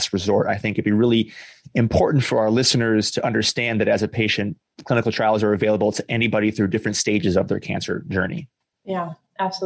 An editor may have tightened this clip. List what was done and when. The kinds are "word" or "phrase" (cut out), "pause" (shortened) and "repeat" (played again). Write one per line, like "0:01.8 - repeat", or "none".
none